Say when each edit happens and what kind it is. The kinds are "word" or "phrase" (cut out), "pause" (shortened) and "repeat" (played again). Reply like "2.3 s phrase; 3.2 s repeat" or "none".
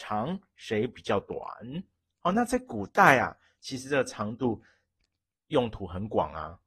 none